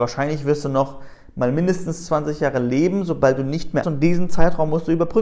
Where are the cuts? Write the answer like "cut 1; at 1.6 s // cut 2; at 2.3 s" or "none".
cut 1; at 3.8 s